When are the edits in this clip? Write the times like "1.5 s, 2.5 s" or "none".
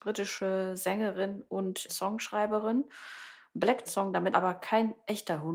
1.9 s, 3.9 s, 4.3 s